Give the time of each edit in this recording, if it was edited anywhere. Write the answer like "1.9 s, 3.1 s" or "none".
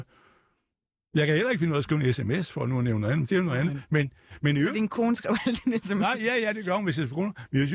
none